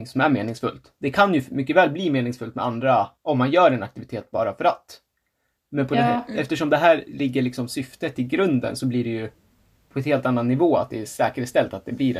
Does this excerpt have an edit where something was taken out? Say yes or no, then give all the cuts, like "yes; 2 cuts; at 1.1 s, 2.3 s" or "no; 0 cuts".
yes; 1 cut; at 3.2 s